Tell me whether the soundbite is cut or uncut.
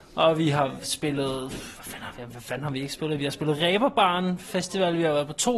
uncut